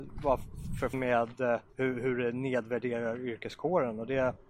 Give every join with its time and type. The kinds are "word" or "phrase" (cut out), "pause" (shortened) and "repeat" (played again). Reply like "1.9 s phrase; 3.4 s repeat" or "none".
0.9 s word; 1.7 s pause